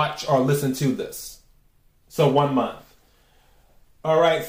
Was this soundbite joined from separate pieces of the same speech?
no; 0 cuts

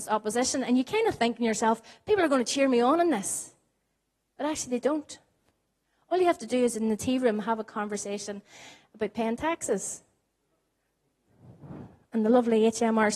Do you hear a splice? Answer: no; 0 cuts

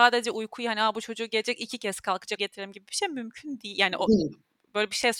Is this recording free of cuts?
no; 1 cut; at 2.4 s

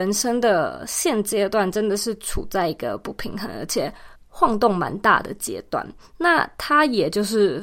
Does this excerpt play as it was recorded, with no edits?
no; 1 cut; at 4.2 s

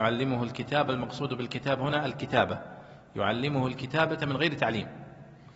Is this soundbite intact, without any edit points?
yes; 0 cuts

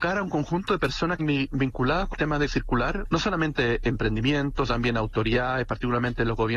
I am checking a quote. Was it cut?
yes; 5 cuts; at 1.2 s, 2.1 s, 2.5 s, 3.0 s, 4.7 s

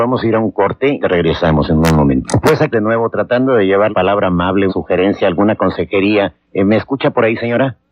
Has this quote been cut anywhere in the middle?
yes; 4 cuts; at 1.0 s, 2.7 s, 3.9 s, 4.7 s

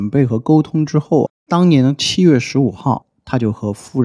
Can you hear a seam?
yes; 1 cut; at 1.4 s

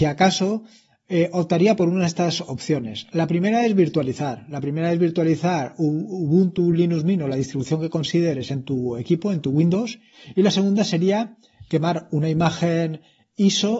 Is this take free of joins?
yes; 0 cuts

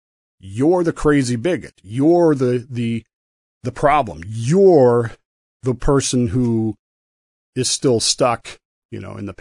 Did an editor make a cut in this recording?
no; 0 cuts

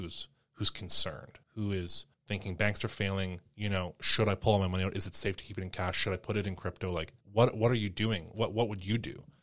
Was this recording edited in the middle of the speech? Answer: yes; 3 cuts; at 1.4 s, 2.1 s, 7.2 s

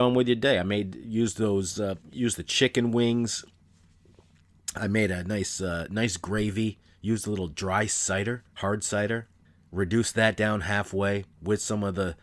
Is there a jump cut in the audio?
yes; 3 cuts; at 2.0 s, 8.5 s, 9.4 s

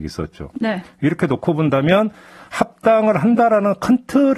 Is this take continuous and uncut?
yes; 0 cuts

